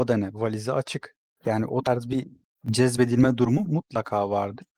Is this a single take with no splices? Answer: yes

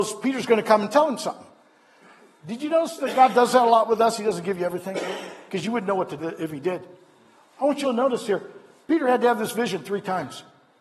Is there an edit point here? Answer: yes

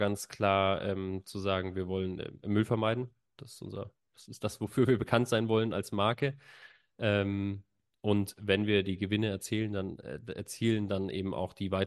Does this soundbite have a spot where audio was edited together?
no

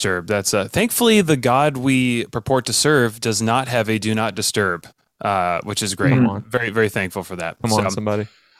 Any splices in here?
no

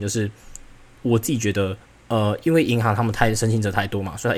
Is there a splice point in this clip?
yes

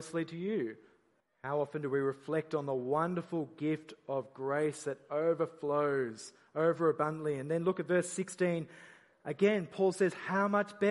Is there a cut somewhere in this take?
yes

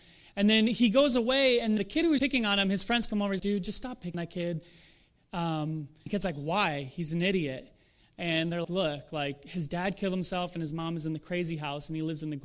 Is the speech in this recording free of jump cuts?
no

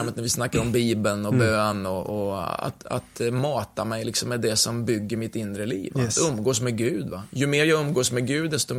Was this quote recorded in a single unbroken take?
yes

